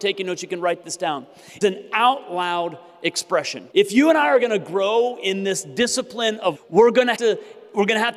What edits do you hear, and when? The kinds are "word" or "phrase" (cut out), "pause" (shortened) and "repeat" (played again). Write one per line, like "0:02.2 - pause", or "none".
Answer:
0:01.6 - phrase
0:03.7 - pause
0:06.5 - word
0:07.1 - word